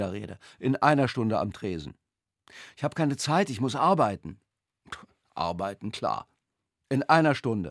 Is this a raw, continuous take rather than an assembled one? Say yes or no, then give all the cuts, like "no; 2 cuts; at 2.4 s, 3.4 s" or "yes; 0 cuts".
yes; 0 cuts